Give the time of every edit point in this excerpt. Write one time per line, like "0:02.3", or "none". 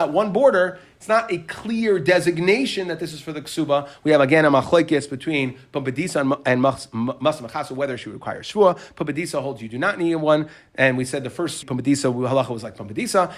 0:11.6